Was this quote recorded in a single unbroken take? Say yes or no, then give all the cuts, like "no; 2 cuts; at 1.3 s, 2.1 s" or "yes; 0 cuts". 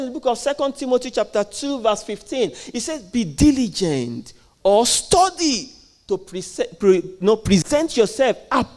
yes; 0 cuts